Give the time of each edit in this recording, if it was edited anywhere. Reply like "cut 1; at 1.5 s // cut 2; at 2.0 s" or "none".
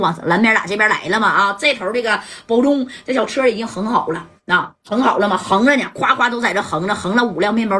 cut 1; at 4.8 s

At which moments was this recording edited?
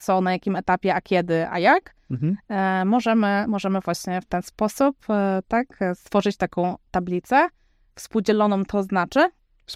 none

